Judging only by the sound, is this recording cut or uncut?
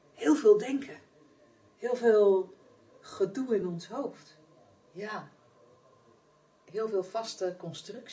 uncut